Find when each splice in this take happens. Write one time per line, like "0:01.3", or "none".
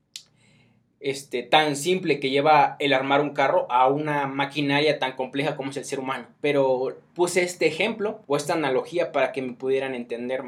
0:06.3
0:08.2